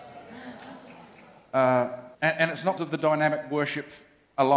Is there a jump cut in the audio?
yes; 2 cuts; at 2.1 s, 2.8 s

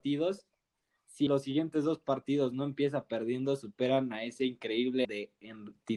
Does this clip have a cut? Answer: yes; 2 cuts; at 1.3 s, 5.0 s

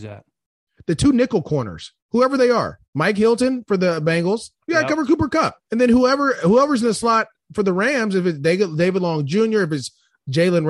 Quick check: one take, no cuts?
no; 4 cuts; at 2.0 s, 2.8 s, 4.6 s, 5.6 s

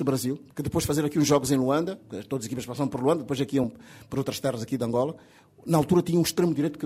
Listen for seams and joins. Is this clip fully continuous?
yes; 0 cuts

